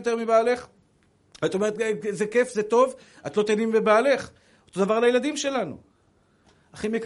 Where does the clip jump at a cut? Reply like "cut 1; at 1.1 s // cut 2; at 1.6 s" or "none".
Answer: none